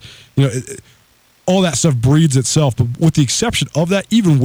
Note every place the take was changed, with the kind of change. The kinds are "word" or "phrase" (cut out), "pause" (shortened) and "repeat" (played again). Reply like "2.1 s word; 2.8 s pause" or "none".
none